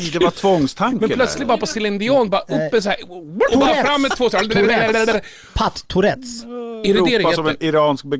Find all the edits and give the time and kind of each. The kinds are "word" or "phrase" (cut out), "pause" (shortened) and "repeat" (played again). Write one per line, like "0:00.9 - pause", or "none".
0:03.5 - word

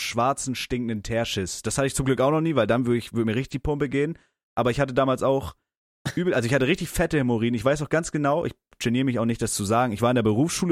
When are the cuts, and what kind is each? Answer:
none

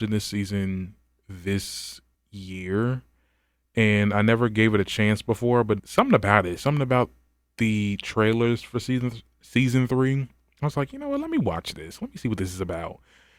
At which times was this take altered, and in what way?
0:02.1 - pause
0:05.8 - word

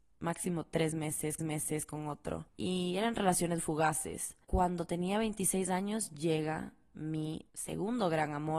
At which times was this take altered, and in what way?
0:01.4 - repeat
0:03.6 - word
0:07.5 - pause

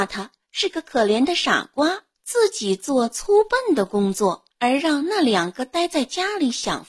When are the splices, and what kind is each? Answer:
0:02.1 - pause
0:04.5 - pause

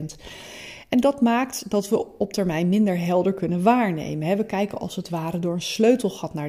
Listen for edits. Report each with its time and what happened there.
none

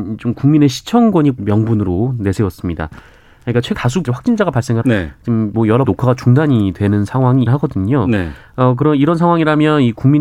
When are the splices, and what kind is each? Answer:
0:01.4 - word
0:03.7 - word
0:04.0 - word
0:04.8 - word
0:05.9 - word
0:07.5 - word

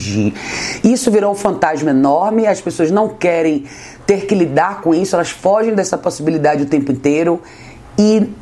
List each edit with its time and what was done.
none

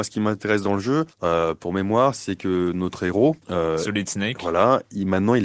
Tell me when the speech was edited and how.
0:01.1 - pause
0:03.4 - pause

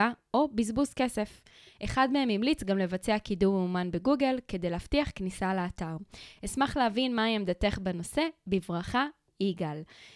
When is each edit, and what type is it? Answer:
none

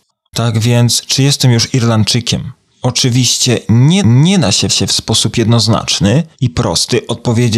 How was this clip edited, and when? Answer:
0:04.0 - repeat
0:04.7 - repeat
0:06.3 - pause

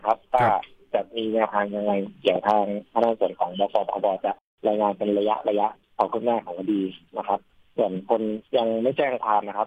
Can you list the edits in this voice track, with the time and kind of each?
0:08.5 - pause

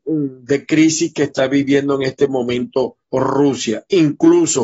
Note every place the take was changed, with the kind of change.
0:03.0 - pause

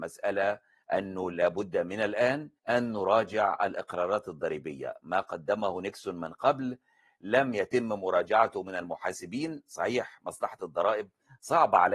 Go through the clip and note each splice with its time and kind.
0:02.6 - pause

